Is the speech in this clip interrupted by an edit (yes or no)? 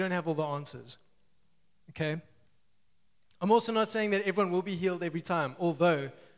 no